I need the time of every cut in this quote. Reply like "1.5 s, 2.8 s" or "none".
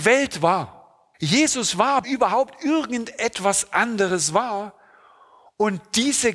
1.1 s, 2.0 s